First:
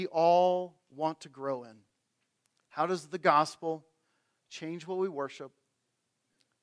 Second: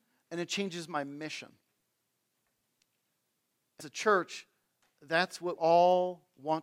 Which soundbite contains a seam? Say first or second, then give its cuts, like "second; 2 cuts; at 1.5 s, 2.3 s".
second; 2 cuts; at 3.8 s, 5.6 s